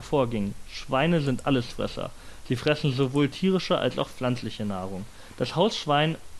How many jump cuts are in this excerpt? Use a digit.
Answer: 0